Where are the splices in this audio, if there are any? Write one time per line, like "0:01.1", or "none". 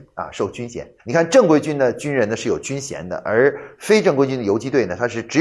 0:01.0